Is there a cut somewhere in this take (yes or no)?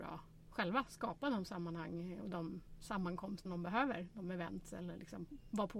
yes